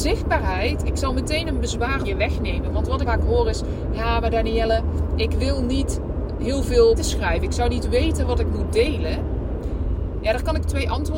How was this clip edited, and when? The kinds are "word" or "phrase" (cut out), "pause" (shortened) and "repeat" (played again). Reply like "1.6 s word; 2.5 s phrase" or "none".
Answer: 2.0 s word; 3.1 s word; 6.4 s word; 7.0 s word